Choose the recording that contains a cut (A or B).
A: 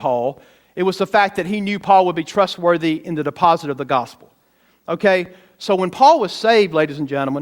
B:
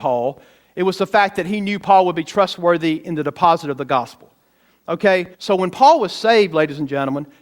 B